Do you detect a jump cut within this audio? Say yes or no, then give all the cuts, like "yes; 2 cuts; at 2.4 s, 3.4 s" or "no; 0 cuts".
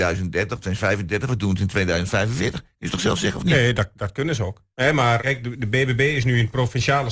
yes; 2 cuts; at 4.7 s, 5.2 s